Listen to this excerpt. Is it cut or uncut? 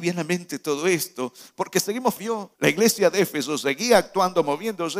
cut